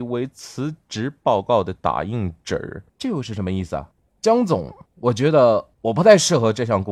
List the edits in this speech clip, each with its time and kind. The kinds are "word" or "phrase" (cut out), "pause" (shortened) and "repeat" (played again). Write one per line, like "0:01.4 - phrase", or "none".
0:02.9 - pause
0:03.9 - pause
0:04.9 - pause
0:05.7 - pause